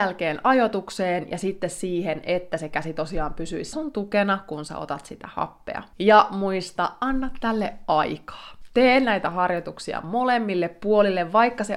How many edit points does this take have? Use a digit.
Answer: 2